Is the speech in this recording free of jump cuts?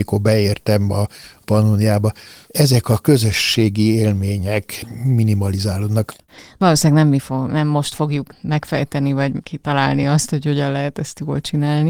yes; 0 cuts

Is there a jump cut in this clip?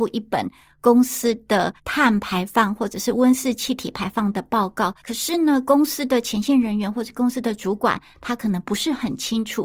yes; 2 cuts; at 1.8 s, 5.0 s

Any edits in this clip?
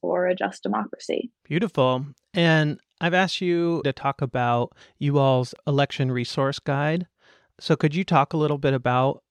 yes; 2 cuts; at 1.4 s, 3.8 s

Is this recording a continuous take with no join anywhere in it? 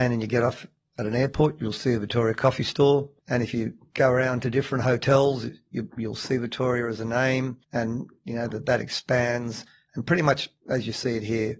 no; 2 cuts; at 3.2 s, 7.6 s

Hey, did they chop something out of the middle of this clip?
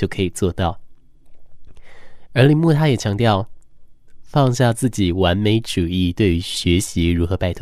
no; 0 cuts

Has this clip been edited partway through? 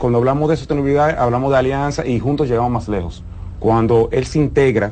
no; 0 cuts

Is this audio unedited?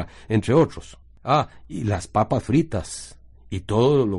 yes; 0 cuts

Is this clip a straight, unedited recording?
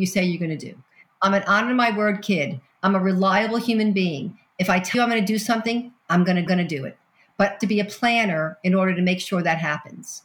no; 3 cuts; at 4.9 s, 6.5 s, 7.6 s

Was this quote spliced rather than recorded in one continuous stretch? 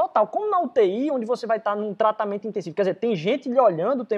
no; 0 cuts

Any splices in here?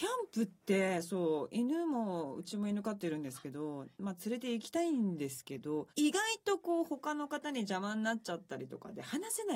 yes; 1 cut; at 5.9 s

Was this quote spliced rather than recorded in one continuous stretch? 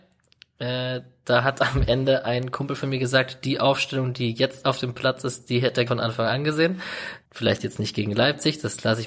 yes; 2 cuts; at 5.9 s, 7.3 s

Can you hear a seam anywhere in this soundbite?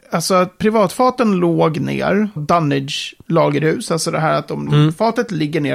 yes; 2 cuts; at 2.4 s, 4.7 s

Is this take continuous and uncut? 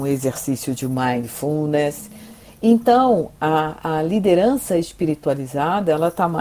yes; 0 cuts

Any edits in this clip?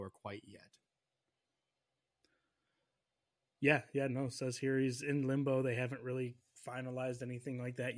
no; 0 cuts

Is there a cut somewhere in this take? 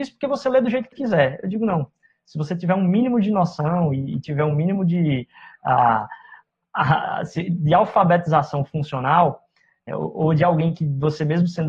yes; 2 cuts; at 0.9 s, 9.9 s

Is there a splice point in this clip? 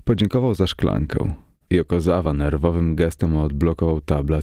no; 0 cuts

